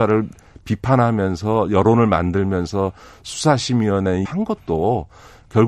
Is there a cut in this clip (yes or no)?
yes